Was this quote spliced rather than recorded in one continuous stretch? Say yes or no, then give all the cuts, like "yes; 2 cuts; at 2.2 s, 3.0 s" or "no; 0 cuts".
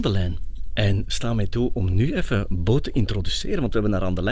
no; 0 cuts